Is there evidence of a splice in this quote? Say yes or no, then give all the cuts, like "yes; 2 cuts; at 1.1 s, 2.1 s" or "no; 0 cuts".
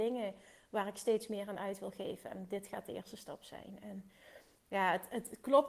no; 0 cuts